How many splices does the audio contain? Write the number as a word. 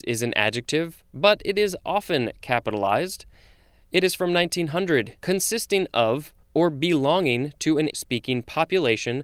three